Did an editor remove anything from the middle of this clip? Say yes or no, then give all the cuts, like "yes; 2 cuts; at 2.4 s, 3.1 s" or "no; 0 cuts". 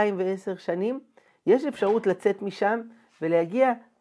no; 0 cuts